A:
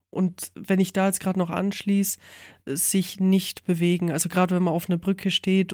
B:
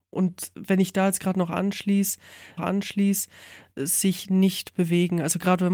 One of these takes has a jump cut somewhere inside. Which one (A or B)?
B